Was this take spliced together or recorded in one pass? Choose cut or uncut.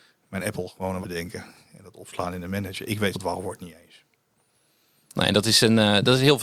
cut